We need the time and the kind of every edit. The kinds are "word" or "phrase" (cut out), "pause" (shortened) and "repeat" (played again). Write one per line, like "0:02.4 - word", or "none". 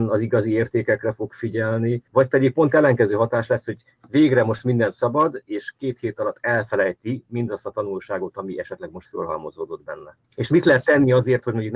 0:02.1 - pause
0:10.2 - pause